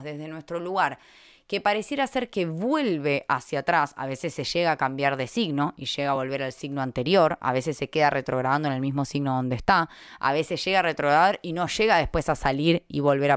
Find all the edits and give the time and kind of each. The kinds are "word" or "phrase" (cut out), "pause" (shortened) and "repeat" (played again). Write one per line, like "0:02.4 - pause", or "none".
none